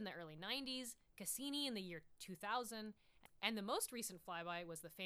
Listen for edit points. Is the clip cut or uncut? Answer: uncut